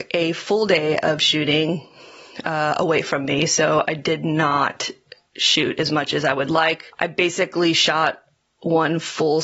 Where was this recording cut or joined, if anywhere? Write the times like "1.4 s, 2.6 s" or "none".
none